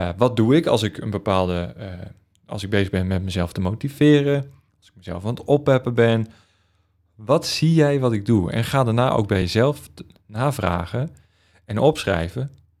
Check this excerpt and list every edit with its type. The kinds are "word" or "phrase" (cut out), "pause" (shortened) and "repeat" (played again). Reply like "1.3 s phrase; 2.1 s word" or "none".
none